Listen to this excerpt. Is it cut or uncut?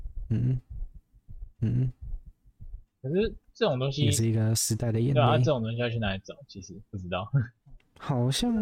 cut